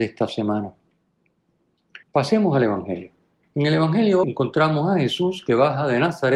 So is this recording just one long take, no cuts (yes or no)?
no